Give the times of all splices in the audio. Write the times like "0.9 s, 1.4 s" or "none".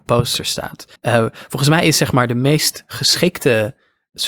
1.0 s